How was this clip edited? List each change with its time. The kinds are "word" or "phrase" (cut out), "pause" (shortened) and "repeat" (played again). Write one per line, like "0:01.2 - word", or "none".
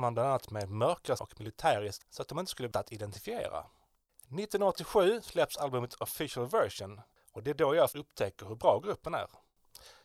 0:01.2 - word
0:02.0 - word
0:02.7 - word
0:07.9 - word